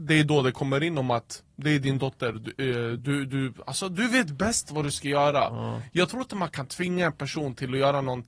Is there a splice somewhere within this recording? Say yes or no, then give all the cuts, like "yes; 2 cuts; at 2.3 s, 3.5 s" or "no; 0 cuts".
no; 0 cuts